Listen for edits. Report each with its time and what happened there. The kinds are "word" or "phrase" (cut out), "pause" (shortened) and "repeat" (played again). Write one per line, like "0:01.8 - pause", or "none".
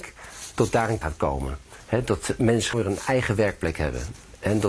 0:01.0 - word
0:02.7 - word